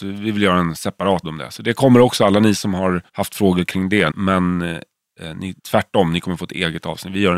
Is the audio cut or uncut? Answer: cut